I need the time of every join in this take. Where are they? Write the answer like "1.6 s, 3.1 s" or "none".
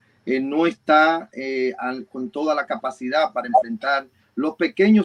none